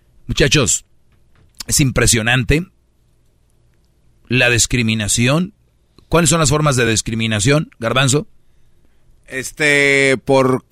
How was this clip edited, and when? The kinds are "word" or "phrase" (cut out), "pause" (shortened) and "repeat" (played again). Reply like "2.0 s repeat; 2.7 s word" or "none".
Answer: none